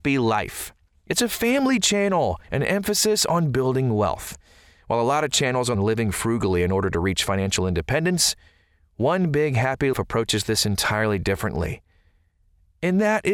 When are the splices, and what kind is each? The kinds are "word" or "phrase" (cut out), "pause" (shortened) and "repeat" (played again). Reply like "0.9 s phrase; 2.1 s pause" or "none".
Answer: 2.4 s pause; 5.7 s phrase; 9.9 s word